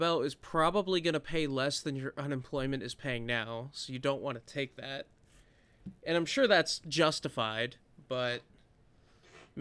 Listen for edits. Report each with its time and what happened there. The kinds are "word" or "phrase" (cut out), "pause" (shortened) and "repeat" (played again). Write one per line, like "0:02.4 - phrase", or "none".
none